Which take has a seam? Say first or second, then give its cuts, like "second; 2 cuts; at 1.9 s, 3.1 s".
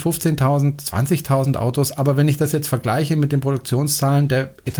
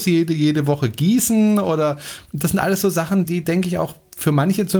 second; 1 cut; at 3.2 s